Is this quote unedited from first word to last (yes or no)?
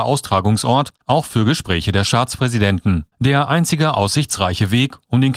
no